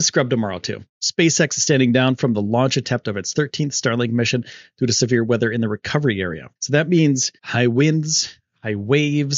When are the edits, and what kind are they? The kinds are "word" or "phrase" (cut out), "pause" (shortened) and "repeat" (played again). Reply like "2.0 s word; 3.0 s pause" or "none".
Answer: 6.6 s pause; 7.4 s pause

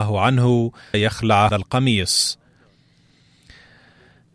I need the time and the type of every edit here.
0.9 s word; 1.5 s word

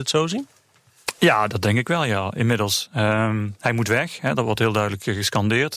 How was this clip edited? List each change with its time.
none

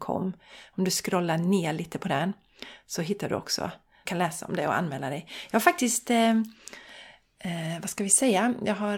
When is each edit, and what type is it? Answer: 4.1 s phrase

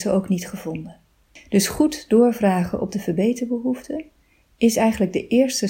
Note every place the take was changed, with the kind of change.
none

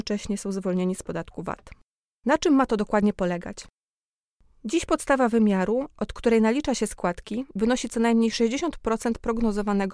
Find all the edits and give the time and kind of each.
none

